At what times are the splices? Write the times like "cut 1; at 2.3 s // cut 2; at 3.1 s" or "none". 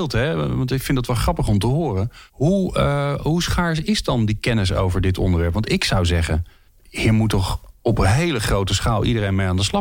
cut 1; at 2.3 s // cut 2; at 6.7 s